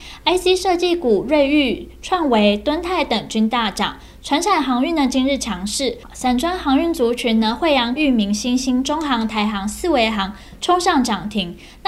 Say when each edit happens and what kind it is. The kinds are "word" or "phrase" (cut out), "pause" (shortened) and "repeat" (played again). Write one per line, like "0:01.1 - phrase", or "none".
0:08.0 - word